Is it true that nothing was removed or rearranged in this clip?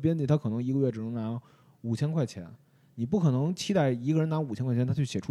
yes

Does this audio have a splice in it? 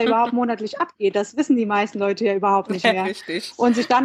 no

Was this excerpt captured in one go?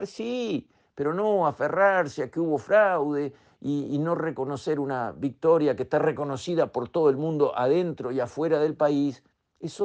yes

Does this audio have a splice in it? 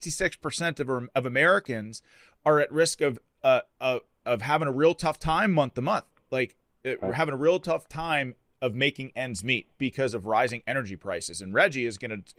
no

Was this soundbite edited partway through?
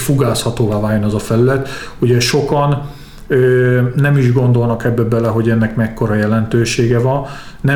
no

